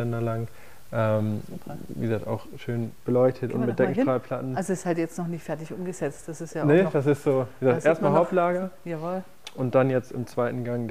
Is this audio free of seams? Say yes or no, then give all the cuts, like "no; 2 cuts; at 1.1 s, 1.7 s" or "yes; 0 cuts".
yes; 0 cuts